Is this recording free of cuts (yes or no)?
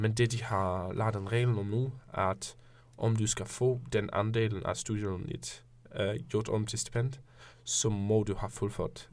yes